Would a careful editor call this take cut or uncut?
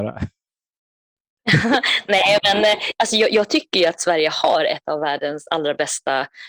uncut